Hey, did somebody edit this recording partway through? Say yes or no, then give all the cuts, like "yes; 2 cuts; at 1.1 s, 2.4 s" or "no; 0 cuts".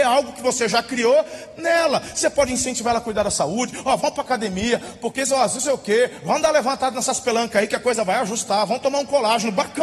no; 0 cuts